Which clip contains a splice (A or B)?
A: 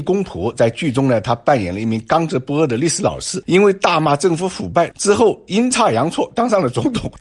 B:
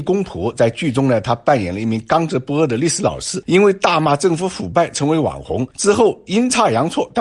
A